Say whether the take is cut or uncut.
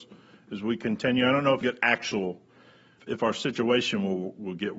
cut